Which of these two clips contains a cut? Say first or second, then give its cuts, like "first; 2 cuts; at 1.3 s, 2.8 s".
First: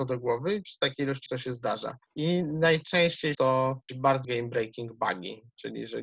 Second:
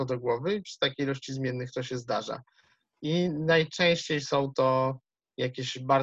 first; 5 cuts; at 1.3 s, 2.1 s, 3.3 s, 3.9 s, 4.2 s